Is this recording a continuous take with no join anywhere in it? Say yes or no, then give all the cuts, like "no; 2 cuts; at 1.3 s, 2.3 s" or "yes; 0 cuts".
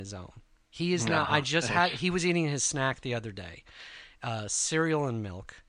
yes; 0 cuts